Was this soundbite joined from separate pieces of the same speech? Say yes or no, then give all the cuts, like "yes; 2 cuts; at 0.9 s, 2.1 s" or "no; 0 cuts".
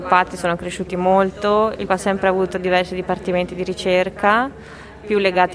yes; 1 cut; at 1.9 s